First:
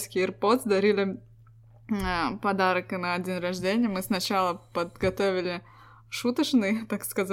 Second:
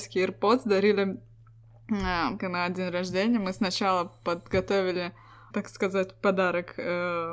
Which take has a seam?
second; 2 cuts; at 2.4 s, 5.5 s

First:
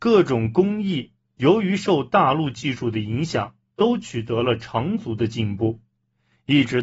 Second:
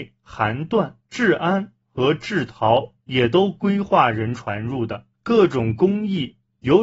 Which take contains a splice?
second; 2 cuts; at 1.0 s, 5.1 s

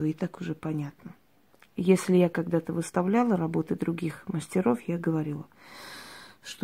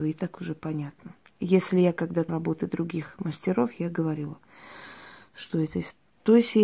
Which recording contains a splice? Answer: second; 2 cuts; at 1.2 s, 2.3 s

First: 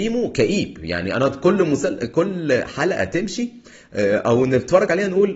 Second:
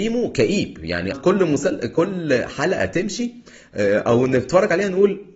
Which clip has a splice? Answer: second; 1 cut; at 1.1 s

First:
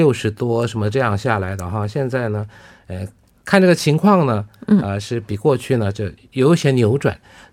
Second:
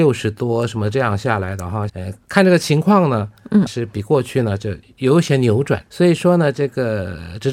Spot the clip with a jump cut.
second; 4 cuts; at 1.9 s, 2.2 s, 3.7 s, 5.9 s

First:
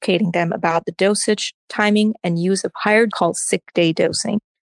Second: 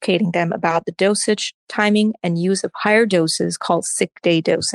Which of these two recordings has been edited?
first; 1 cut; at 3.1 s

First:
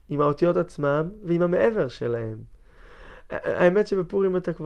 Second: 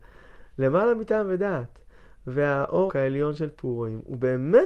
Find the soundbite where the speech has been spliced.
second; 1 cut; at 2.9 s

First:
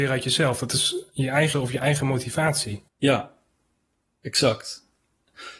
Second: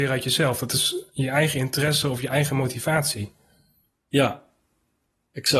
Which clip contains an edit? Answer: first; 2 cuts; at 1.5 s, 2.9 s

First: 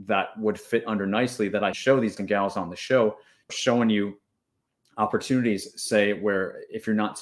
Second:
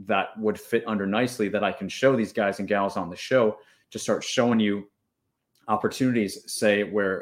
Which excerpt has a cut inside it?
first; 3 cuts; at 1.7 s, 2.2 s, 3.5 s

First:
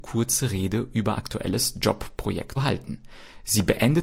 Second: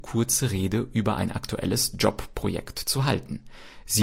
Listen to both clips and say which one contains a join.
first; 2 cuts; at 1.1 s, 2.6 s

